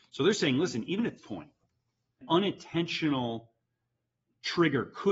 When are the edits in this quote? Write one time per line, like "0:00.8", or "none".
0:01.2
0:02.2